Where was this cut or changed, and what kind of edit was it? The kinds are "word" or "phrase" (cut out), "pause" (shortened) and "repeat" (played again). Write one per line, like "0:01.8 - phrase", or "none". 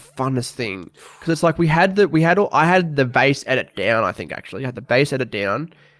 0:01.1 - pause